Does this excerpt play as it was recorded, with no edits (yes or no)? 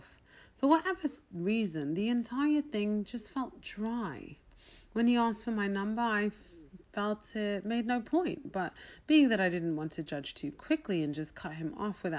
yes